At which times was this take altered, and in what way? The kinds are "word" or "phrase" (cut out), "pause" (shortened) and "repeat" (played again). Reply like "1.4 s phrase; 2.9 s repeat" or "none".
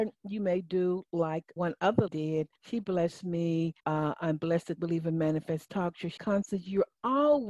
1.6 s word; 2.1 s word; 2.6 s pause; 3.8 s pause; 4.8 s word; 6.2 s word